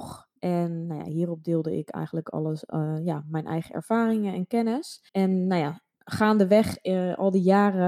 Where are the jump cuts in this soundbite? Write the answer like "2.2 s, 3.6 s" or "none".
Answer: 5.1 s